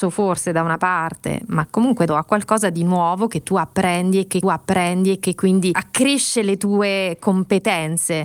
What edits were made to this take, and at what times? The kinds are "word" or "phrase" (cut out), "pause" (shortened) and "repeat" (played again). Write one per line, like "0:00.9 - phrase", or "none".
0:02.1 - word
0:04.4 - repeat

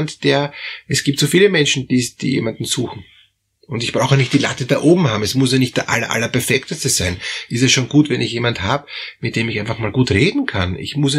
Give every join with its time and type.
none

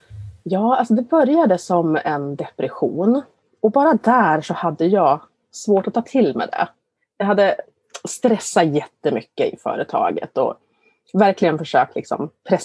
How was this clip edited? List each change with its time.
none

